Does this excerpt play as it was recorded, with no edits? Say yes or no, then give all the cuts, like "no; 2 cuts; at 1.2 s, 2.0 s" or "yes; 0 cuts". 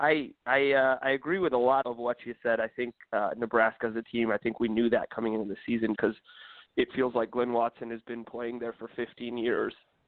no; 3 cuts; at 1.8 s, 4.0 s, 6.0 s